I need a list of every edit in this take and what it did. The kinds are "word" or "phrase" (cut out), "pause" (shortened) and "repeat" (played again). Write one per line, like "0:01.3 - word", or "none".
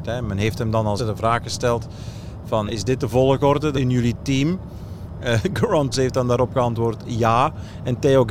0:01.0 - word
0:02.7 - word
0:03.7 - word
0:05.9 - word